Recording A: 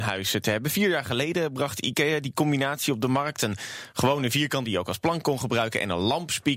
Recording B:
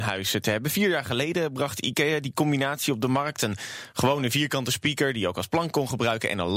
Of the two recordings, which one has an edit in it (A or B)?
A